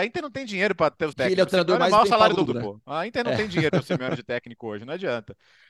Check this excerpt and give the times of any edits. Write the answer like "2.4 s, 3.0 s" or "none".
1.1 s, 2.5 s, 3.7 s